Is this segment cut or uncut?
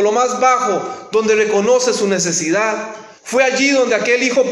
cut